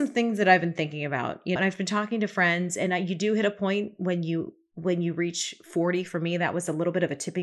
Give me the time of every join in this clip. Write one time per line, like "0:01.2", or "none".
0:01.6